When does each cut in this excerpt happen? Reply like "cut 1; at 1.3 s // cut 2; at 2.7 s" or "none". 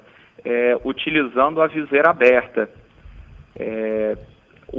none